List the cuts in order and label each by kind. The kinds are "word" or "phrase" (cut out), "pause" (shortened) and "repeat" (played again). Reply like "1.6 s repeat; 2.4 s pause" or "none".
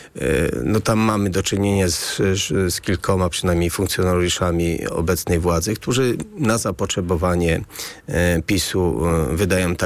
none